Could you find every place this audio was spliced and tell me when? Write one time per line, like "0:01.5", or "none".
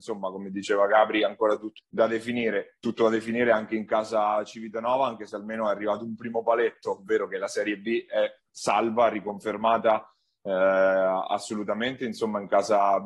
0:01.8